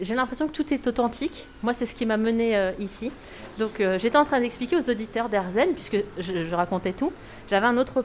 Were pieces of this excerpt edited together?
no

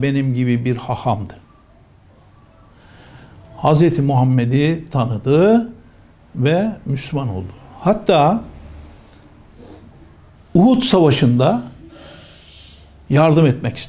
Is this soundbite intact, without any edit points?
yes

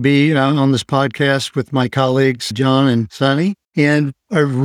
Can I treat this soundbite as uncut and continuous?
no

